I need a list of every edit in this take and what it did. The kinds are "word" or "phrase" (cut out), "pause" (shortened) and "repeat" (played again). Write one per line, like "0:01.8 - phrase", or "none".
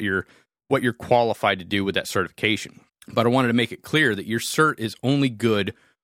0:02.9 - pause